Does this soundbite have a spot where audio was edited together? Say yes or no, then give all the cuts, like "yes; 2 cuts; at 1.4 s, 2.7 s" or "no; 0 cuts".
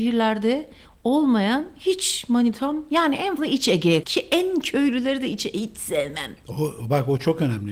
yes; 2 cuts; at 3.4 s, 4.0 s